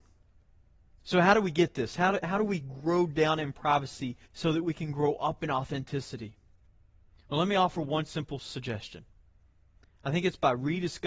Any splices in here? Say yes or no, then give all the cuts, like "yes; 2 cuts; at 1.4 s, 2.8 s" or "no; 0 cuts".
yes; 1 cut; at 4.2 s